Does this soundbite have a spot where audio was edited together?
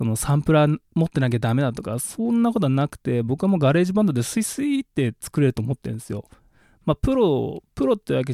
no; 0 cuts

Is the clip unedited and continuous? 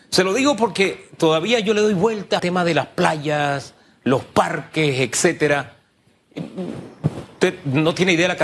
no; 1 cut; at 2.4 s

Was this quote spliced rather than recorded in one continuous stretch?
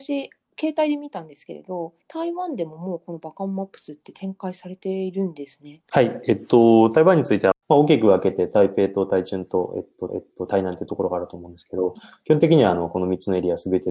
yes; 3 cuts; at 2.0 s, 7.6 s, 10.1 s

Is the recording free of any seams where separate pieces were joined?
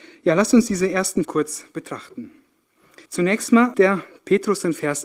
no; 3 cuts; at 1.2 s, 3.1 s, 3.7 s

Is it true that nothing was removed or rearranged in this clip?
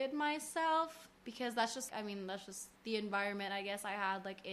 no; 3 cuts; at 1.2 s, 1.9 s, 2.8 s

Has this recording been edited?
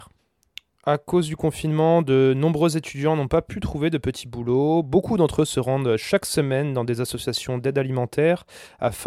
no; 0 cuts

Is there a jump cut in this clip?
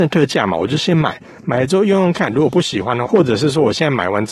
yes; 1 cut; at 3.0 s

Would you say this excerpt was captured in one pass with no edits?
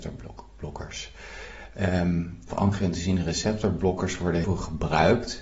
no; 2 cuts; at 2.5 s, 4.4 s

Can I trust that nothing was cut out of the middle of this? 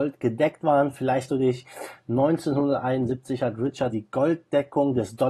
no; 2 cuts; at 1.3 s, 3.9 s

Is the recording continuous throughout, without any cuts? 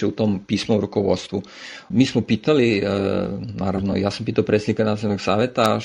yes; 0 cuts

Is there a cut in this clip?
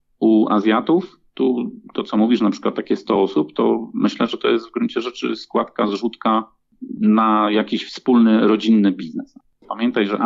no; 0 cuts

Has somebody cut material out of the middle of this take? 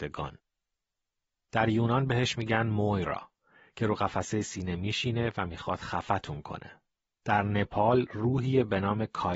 no; 0 cuts

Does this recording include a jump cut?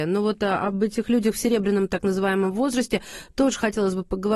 no; 0 cuts

